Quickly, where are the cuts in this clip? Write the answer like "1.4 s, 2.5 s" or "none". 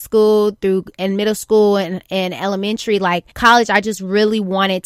3.3 s